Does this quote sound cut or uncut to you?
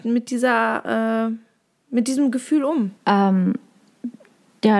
cut